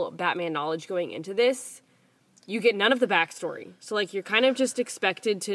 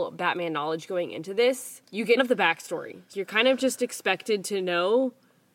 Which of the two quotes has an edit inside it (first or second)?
second